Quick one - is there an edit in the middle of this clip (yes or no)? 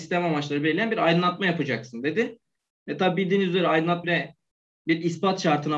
yes